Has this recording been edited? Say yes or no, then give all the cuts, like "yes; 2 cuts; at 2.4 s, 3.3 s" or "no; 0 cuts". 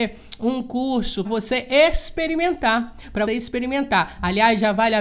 yes; 2 cuts; at 1.2 s, 3.3 s